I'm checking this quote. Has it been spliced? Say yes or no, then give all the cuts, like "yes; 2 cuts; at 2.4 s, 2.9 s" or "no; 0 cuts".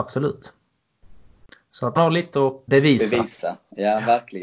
yes; 2 cuts; at 2.0 s, 2.7 s